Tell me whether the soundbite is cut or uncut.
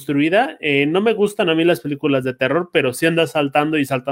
uncut